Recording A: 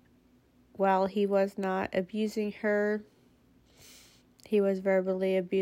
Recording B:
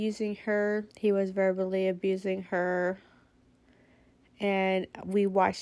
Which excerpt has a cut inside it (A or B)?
B